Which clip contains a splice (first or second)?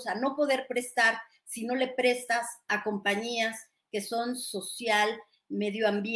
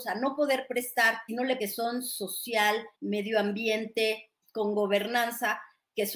second